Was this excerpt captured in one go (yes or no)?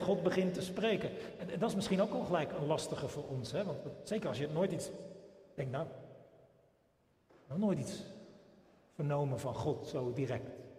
yes